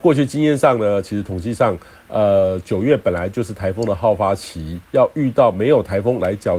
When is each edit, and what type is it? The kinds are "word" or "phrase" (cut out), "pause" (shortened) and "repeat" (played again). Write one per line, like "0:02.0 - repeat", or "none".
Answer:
0:04.8 - pause

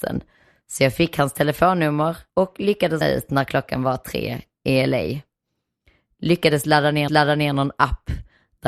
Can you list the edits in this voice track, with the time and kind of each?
0:02.3 - pause
0:03.0 - word
0:07.1 - repeat

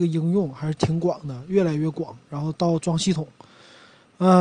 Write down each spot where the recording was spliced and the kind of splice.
none

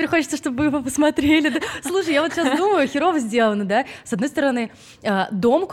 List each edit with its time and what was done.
none

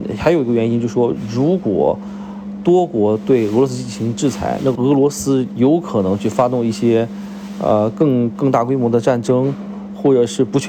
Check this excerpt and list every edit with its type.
0:04.8 - word

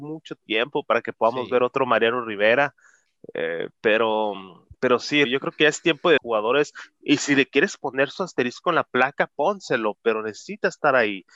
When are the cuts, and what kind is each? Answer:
0:04.7 - pause
0:05.2 - word
0:06.2 - phrase

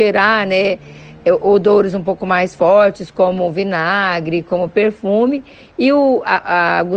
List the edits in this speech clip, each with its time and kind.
none

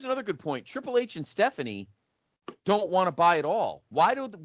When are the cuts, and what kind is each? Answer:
none

